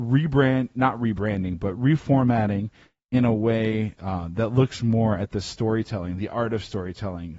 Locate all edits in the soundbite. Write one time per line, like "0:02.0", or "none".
none